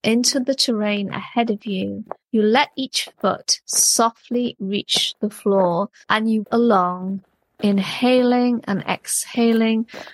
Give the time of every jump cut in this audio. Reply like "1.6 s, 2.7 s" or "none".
2.2 s, 6.0 s, 6.4 s